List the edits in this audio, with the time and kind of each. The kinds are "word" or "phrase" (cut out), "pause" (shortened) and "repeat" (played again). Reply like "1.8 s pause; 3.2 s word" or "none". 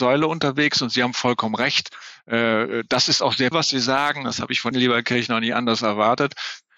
3.5 s word; 4.7 s word